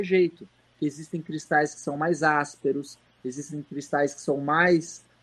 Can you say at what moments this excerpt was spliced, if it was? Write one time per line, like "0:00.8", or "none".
none